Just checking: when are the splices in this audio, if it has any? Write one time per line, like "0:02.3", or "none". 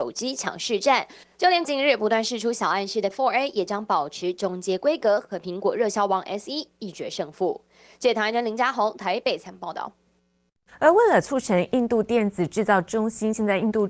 0:01.6
0:03.1